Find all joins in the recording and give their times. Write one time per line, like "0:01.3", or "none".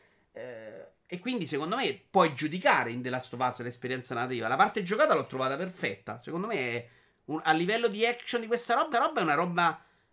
0:08.9